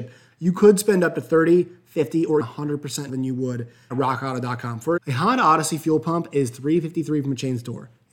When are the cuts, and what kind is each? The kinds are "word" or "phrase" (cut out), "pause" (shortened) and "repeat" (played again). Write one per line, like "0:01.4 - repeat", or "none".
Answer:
0:02.4 - word
0:03.1 - word
0:03.9 - word
0:05.0 - word